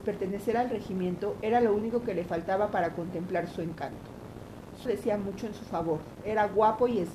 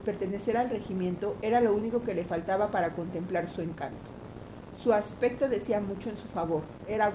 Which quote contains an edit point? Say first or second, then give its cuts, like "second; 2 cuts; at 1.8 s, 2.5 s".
first; 1 cut; at 4.9 s